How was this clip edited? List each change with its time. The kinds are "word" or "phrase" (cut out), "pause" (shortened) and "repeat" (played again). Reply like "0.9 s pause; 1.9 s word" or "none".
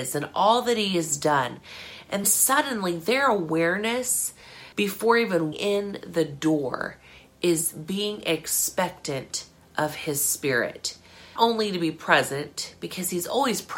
2.2 s word; 4.7 s pause; 5.5 s word; 11.4 s word